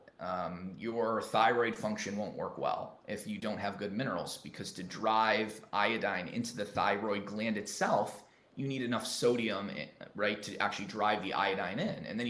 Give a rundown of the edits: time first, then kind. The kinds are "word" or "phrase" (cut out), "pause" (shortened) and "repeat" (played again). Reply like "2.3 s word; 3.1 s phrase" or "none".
none